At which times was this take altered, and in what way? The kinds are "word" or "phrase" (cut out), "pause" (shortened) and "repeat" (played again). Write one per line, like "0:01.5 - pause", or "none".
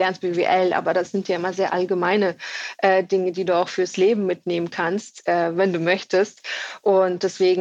none